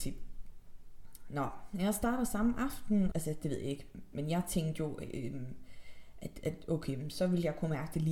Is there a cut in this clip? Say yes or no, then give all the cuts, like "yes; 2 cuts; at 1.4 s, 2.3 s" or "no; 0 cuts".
yes; 2 cuts; at 3.1 s, 4.1 s